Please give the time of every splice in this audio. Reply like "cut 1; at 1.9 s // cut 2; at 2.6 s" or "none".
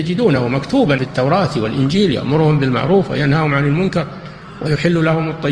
cut 1; at 1.0 s